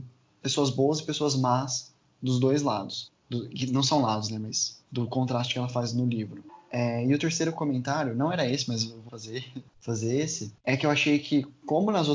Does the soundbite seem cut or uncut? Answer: cut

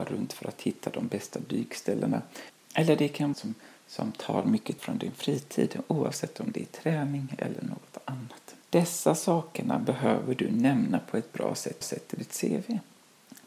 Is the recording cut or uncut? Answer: cut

